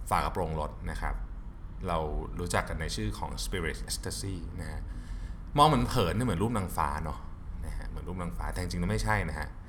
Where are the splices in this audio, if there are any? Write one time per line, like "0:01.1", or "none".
0:03.9